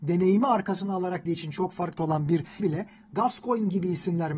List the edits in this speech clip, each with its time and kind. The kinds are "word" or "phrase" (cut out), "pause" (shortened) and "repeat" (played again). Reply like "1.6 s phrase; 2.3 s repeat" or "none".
1.3 s word; 2.0 s word; 2.6 s word

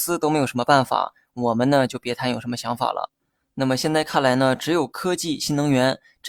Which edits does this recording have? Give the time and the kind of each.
none

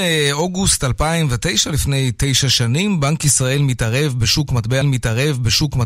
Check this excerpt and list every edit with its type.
4.8 s repeat

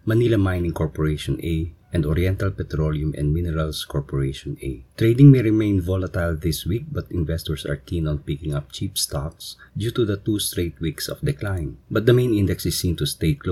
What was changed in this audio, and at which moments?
1.8 s pause; 4.9 s pause; 9.7 s pause; 11.8 s pause

